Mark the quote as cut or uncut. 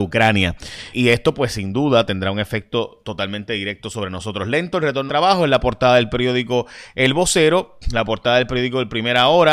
cut